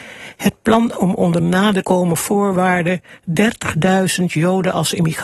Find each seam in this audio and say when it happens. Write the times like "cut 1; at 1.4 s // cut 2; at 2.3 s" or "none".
cut 1; at 0.9 s // cut 2; at 1.8 s